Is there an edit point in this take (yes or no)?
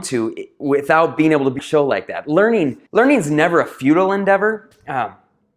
yes